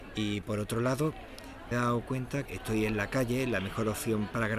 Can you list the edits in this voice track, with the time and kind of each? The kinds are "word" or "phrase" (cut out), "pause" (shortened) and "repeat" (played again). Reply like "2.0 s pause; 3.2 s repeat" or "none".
1.7 s phrase; 2.5 s phrase